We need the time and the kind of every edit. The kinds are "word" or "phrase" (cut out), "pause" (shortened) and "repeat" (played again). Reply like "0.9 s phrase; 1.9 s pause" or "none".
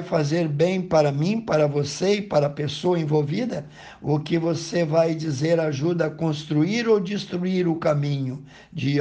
none

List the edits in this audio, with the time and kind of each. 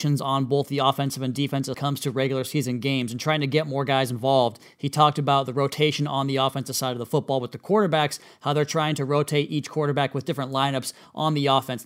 1.7 s phrase

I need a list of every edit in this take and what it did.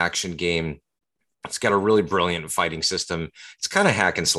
none

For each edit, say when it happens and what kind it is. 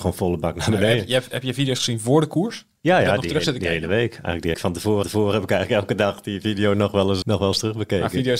4.5 s phrase; 5.0 s repeat; 7.2 s word

